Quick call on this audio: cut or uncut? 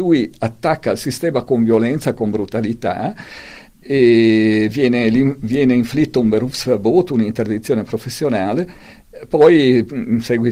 uncut